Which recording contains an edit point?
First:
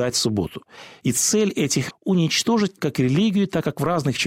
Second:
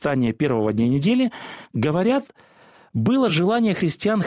first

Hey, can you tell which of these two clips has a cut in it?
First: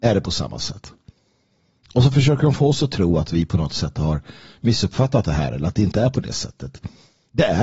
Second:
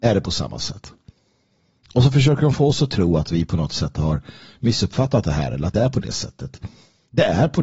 second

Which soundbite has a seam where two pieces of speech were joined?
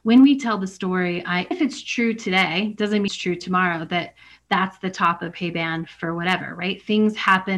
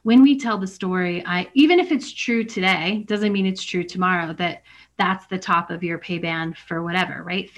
first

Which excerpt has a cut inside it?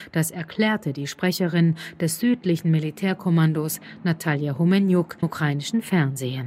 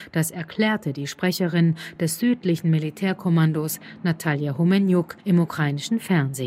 first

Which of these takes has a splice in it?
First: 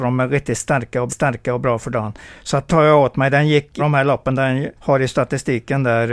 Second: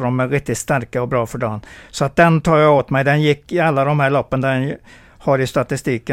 first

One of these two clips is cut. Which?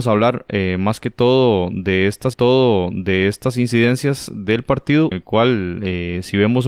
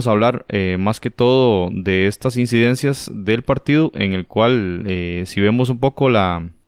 first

